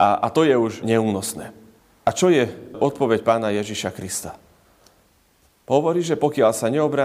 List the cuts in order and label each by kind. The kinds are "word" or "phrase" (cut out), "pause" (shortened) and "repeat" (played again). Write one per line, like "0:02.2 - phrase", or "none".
none